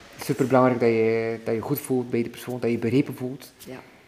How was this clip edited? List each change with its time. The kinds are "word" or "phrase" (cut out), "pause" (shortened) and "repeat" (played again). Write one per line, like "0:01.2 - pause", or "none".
none